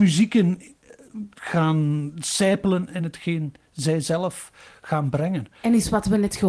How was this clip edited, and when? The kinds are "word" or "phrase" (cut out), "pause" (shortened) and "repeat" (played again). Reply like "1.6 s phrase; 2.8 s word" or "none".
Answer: none